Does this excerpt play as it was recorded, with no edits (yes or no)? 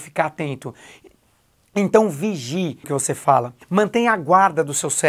no